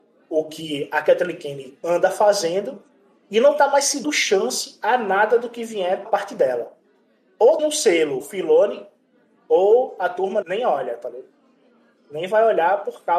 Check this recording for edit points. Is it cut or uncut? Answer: cut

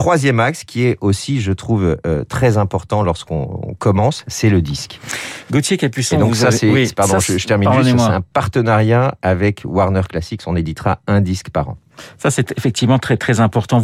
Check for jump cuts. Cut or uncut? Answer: uncut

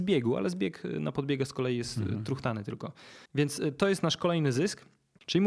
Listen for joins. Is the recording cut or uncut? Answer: cut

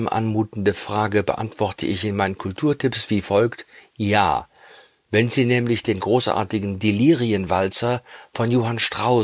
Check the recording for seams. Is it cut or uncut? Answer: uncut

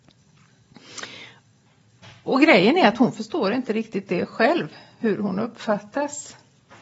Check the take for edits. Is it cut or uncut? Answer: uncut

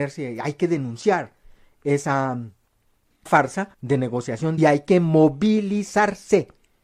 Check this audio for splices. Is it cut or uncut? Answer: cut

